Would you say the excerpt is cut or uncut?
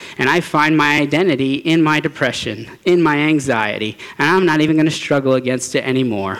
uncut